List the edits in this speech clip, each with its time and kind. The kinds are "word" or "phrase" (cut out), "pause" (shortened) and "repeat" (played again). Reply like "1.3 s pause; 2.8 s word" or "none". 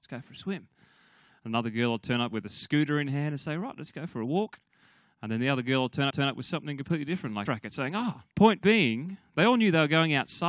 6.1 s repeat; 7.5 s phrase; 8.3 s pause